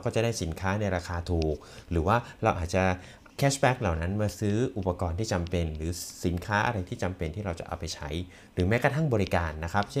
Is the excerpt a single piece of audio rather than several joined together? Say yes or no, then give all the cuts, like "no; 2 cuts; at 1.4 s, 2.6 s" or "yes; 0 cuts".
yes; 0 cuts